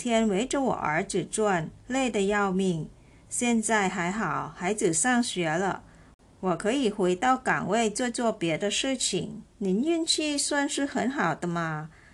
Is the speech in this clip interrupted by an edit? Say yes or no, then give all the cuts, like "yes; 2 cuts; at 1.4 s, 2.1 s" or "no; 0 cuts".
yes; 2 cuts; at 1.8 s, 9.5 s